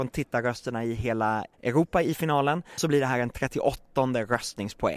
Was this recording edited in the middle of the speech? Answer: yes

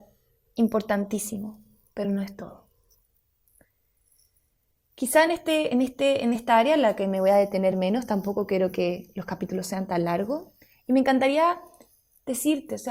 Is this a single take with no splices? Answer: yes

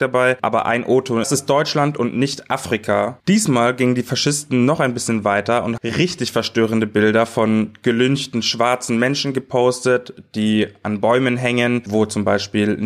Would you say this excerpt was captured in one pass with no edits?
no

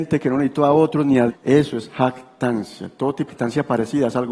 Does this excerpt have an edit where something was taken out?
yes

